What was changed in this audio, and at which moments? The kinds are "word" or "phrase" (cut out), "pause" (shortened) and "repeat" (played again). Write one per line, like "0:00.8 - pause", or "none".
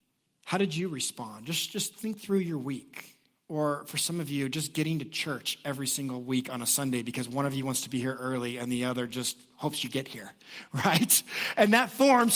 none